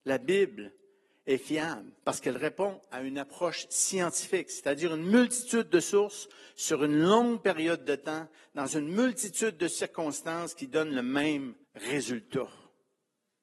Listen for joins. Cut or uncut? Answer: cut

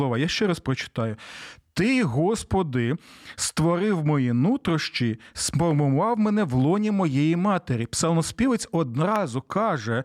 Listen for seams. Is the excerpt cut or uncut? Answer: uncut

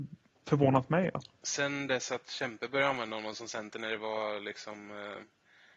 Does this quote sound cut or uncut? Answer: uncut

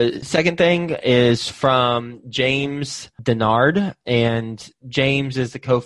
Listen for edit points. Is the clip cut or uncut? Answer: uncut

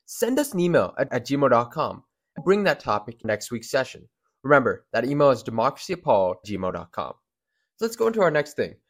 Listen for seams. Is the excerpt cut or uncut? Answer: cut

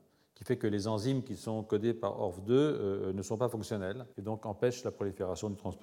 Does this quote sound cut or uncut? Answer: cut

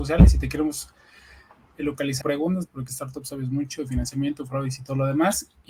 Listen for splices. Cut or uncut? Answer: cut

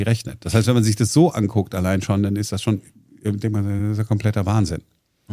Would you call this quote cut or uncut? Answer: uncut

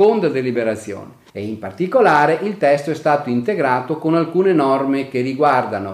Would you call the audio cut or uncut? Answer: cut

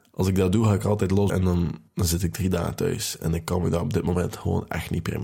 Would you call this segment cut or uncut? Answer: cut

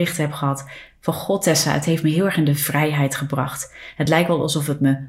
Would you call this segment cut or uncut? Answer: uncut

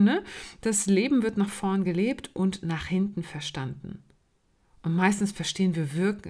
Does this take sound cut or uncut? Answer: uncut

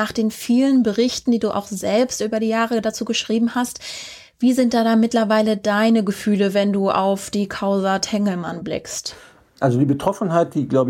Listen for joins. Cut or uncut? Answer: uncut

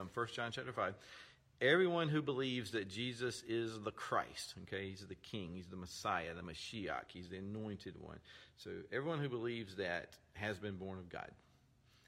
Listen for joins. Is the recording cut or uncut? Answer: uncut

